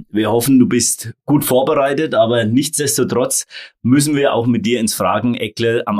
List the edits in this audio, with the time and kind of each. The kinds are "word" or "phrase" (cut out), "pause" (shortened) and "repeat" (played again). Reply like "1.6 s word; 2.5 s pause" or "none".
none